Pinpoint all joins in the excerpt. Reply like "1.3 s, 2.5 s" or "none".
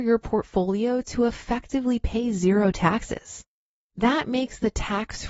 none